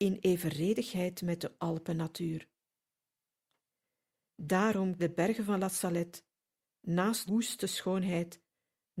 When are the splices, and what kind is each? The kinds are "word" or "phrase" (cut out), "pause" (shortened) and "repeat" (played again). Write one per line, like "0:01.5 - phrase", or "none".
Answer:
0:01.6 - word
0:05.0 - word
0:07.3 - word